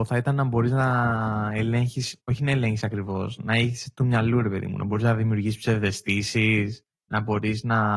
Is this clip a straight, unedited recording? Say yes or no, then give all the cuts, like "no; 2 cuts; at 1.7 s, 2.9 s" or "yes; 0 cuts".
no; 1 cut; at 6.9 s